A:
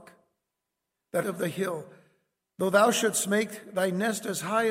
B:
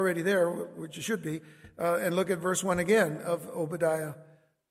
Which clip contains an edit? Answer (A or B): A